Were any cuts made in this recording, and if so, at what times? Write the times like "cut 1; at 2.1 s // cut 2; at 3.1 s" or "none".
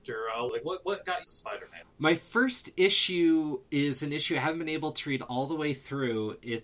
cut 1; at 1.2 s